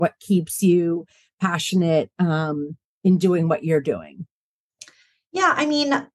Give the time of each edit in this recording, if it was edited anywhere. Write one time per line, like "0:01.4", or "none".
none